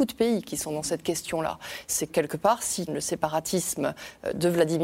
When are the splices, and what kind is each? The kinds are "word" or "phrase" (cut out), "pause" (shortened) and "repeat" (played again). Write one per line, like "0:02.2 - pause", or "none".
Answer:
0:02.1 - word
0:02.9 - word

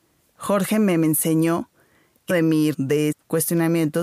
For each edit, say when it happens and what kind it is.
0:02.3 - word
0:02.7 - word
0:03.1 - word

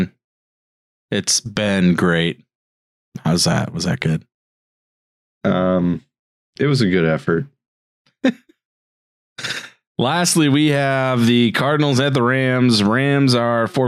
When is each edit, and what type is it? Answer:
none

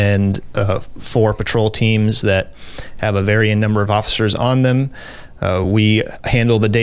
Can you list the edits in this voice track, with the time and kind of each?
none

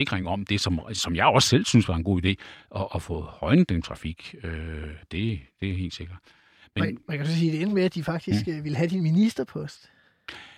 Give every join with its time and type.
0:03.8 - word
0:05.0 - word

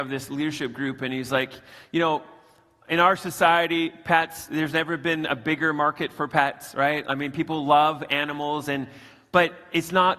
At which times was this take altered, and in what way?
none

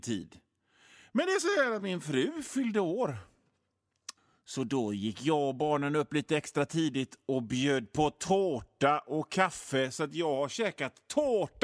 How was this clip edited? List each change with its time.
0:04.2 - pause

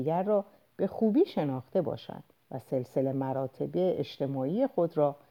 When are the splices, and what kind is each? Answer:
0:02.3 - pause

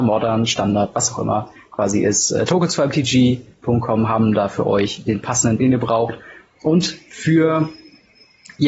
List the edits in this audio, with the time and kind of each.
0:05.6 - word

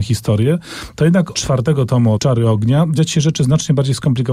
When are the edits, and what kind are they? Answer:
0:01.3 - word
0:02.2 - word
0:03.0 - word

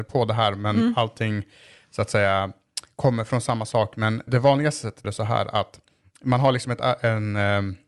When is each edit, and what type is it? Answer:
0:04.3 - word
0:05.0 - phrase

